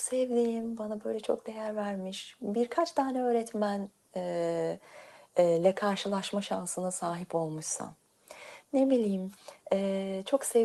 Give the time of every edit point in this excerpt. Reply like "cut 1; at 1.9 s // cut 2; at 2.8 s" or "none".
none